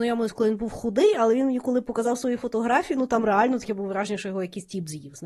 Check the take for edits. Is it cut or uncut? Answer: uncut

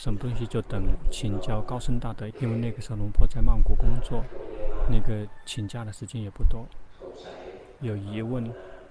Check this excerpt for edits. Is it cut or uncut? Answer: cut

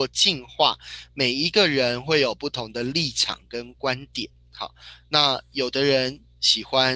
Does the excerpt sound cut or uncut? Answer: uncut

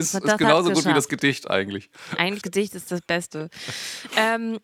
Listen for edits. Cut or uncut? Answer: cut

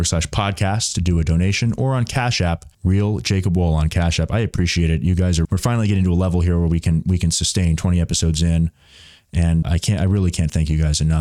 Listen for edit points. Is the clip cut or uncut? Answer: cut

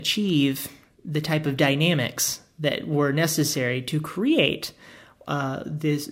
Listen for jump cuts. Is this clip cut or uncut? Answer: uncut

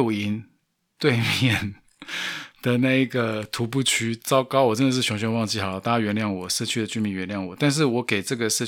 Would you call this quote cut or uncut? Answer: uncut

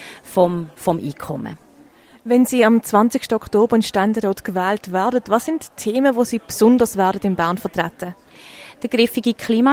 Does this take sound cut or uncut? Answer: uncut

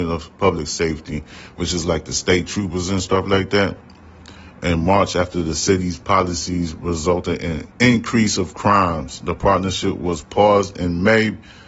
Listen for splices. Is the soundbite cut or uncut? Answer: cut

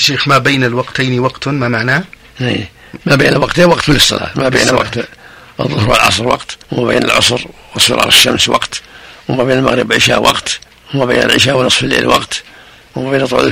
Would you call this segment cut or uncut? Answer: cut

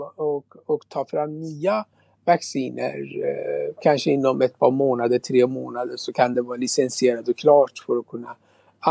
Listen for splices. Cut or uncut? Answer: uncut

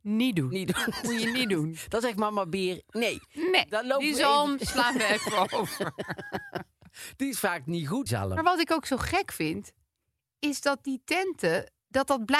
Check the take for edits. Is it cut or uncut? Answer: cut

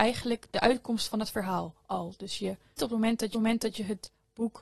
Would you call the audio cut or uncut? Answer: cut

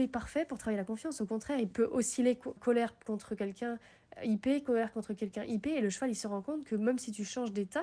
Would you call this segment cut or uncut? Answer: cut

